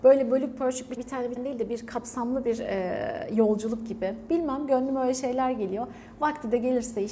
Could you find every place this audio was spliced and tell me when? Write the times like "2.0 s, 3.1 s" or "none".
1.0 s, 1.4 s